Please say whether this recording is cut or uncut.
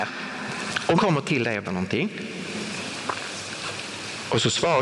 cut